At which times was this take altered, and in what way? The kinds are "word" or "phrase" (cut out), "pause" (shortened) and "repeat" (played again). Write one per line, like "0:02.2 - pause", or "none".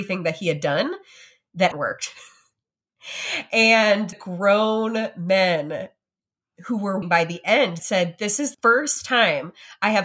0:01.7 - word
0:04.1 - word
0:07.0 - word
0:07.8 - word
0:08.5 - word

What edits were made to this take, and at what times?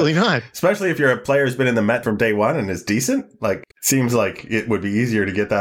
0:02.0 - word
0:03.7 - pause

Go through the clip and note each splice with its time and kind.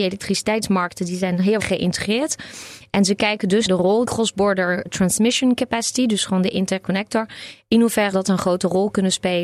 0:01.6 - word
0:03.7 - word
0:04.0 - word
0:04.9 - word
0:08.1 - word

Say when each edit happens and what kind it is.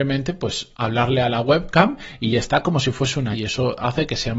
0:03.3 - word

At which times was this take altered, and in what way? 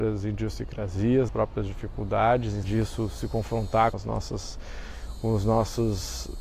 0:01.3 - word
0:02.6 - word
0:03.9 - word

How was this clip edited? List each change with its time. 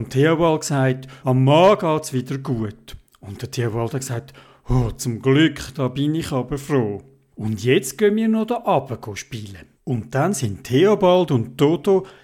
0:01.2 - word
0:09.7 - pause

